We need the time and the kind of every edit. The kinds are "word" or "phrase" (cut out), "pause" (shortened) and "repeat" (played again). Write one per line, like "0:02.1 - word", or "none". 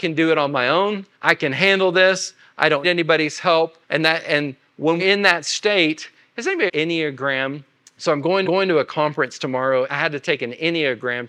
0:01.1 - pause
0:02.8 - word
0:03.8 - pause
0:05.0 - word
0:06.7 - phrase
0:07.8 - pause
0:08.4 - repeat
0:09.9 - word